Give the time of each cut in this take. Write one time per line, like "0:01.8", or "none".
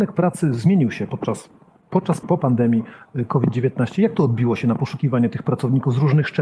0:02.2